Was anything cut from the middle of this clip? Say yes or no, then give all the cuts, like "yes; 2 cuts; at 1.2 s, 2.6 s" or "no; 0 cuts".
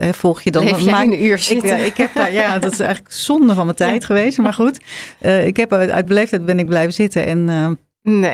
no; 0 cuts